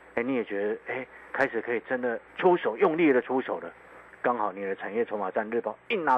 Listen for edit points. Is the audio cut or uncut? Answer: cut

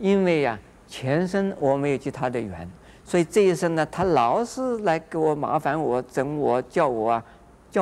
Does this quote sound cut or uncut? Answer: uncut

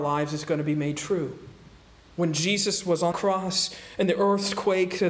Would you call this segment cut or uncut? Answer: cut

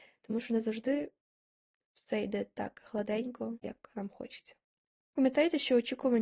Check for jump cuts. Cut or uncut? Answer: uncut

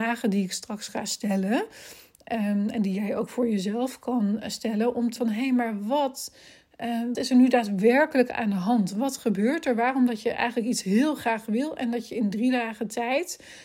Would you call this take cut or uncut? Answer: cut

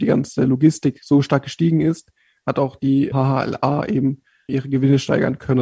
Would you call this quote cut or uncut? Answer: uncut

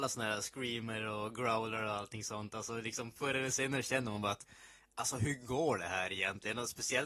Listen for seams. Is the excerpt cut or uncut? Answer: uncut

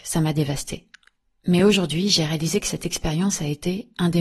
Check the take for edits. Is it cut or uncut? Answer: uncut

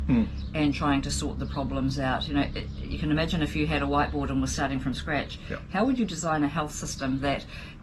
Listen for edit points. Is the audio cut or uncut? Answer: uncut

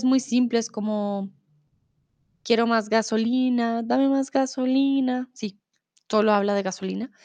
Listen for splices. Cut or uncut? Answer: uncut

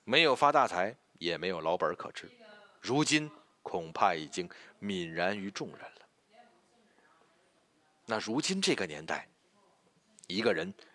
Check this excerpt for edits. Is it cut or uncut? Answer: uncut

